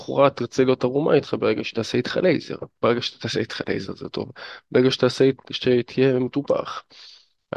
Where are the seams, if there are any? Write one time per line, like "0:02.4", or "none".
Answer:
none